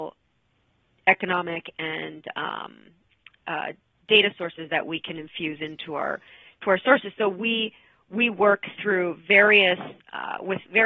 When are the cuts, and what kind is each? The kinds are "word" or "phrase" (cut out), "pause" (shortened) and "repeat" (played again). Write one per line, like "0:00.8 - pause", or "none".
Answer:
none